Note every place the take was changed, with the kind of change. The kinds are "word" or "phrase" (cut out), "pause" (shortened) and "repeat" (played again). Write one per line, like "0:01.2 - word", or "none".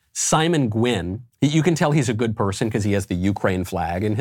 0:01.3 - pause